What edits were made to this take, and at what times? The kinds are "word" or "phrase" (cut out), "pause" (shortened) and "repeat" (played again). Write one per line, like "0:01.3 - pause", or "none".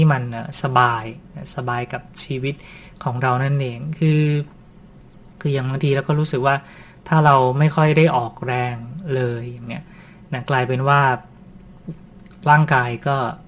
none